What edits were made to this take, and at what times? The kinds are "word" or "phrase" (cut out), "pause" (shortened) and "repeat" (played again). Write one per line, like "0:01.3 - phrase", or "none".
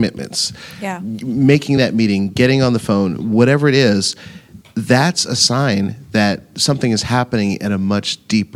none